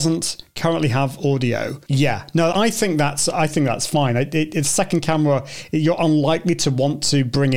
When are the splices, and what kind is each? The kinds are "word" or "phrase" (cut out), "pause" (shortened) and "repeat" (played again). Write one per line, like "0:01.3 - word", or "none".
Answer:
0:02.5 - word